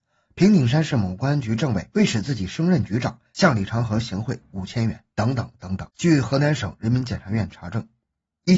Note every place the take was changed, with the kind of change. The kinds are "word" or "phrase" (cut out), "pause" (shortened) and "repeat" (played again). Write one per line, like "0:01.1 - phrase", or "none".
0:05.9 - pause